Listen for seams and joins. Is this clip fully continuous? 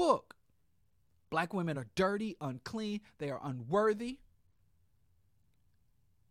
yes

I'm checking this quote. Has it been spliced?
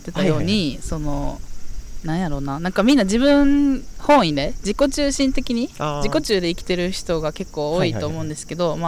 no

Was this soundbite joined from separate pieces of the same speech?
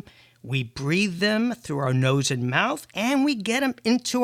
no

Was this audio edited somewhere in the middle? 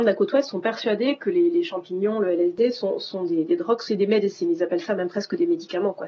no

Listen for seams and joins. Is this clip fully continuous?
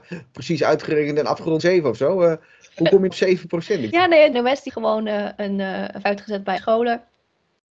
no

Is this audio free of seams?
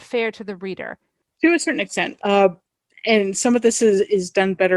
yes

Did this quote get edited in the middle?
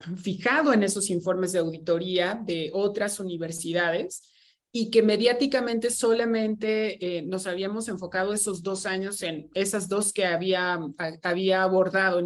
no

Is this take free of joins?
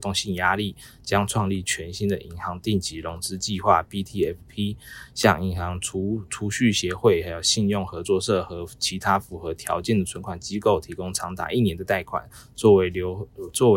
yes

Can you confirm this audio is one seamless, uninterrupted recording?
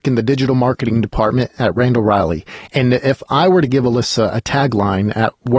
yes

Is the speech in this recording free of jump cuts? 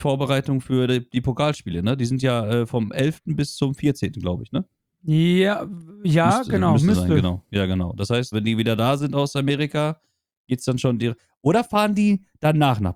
no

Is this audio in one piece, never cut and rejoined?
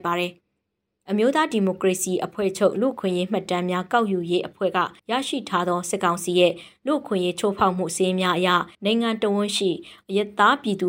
no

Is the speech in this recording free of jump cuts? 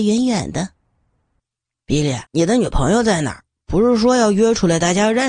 no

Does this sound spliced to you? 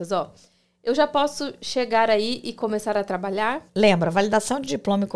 yes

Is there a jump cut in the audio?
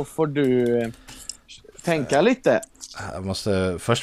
no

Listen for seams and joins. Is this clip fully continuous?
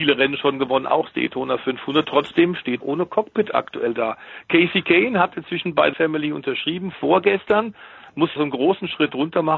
no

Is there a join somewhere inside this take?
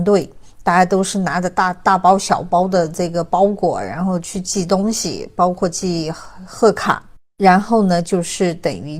yes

